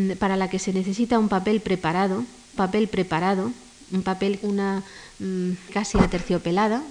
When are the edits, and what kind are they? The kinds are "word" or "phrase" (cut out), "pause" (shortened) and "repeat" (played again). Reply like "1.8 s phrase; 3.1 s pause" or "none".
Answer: 2.6 s repeat; 4.4 s phrase; 5.7 s word

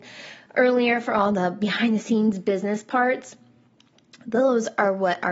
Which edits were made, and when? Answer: none

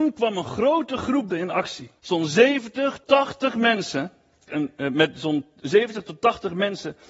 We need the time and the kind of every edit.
1.3 s word; 2.0 s pause; 3.0 s word; 4.5 s word

